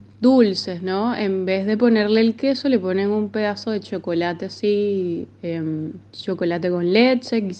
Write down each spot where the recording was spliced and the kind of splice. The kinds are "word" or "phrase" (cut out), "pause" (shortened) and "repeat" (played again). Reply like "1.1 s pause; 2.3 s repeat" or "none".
6.1 s pause